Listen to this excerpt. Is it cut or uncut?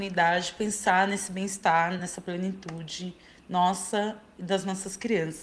uncut